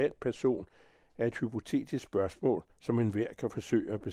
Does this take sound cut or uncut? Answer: cut